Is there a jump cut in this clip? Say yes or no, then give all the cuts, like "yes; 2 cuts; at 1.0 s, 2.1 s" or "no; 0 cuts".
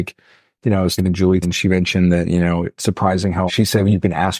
yes; 4 cuts; at 1.0 s, 1.4 s, 2.8 s, 3.5 s